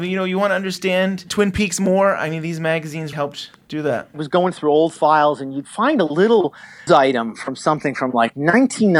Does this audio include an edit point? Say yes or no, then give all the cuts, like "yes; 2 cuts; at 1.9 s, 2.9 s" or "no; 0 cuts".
yes; 2 cuts; at 3.1 s, 6.9 s